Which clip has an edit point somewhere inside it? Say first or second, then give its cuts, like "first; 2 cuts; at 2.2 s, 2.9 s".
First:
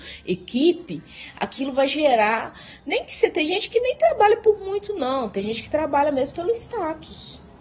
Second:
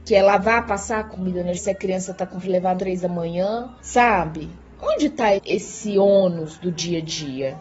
second; 6 cuts; at 1.1 s, 1.5 s, 2.4 s, 2.8 s, 3.8 s, 5.4 s